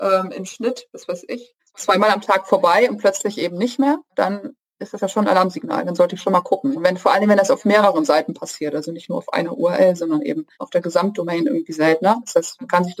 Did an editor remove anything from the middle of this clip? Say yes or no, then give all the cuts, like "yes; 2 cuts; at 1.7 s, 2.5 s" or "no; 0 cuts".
yes; 3 cuts; at 1.6 s, 4.1 s, 10.5 s